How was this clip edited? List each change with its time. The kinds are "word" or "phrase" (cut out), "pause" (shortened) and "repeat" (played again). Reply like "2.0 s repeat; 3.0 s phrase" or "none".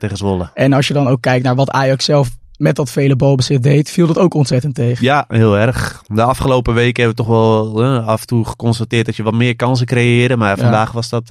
none